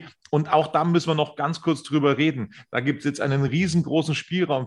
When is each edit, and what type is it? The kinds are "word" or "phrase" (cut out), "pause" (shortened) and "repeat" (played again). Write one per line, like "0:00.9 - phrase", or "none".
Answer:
none